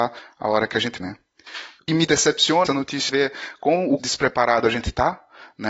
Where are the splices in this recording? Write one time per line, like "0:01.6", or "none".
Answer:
0:01.0
0:01.9
0:02.7
0:03.1
0:04.0